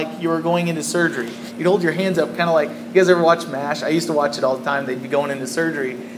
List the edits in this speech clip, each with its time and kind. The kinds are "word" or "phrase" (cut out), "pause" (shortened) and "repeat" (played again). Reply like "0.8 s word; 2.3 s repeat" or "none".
none